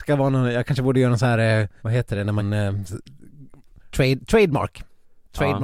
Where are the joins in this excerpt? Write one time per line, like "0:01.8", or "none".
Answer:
0:01.8
0:02.4
0:03.9